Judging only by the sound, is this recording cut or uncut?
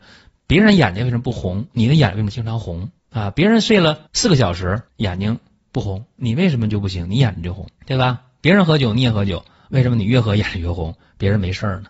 cut